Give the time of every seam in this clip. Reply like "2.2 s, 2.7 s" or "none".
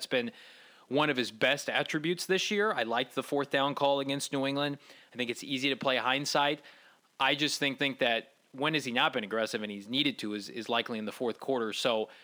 7.8 s